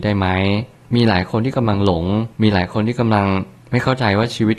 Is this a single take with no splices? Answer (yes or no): no